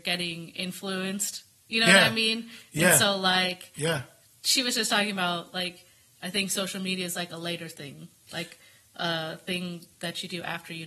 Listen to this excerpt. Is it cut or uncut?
uncut